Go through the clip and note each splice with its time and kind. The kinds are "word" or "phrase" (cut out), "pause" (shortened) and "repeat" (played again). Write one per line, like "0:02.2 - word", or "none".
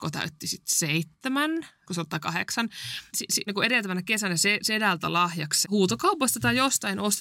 0:01.9 - word
0:03.1 - word
0:03.5 - word
0:04.4 - word
0:05.6 - word